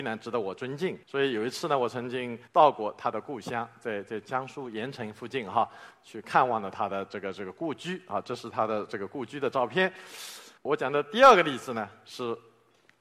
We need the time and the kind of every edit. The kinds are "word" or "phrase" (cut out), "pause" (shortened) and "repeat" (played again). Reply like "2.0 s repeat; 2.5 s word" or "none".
1.0 s pause; 2.5 s pause; 10.6 s pause